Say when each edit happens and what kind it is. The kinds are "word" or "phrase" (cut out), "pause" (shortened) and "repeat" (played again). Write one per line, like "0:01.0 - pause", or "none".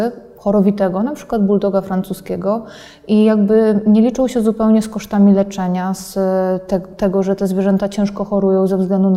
none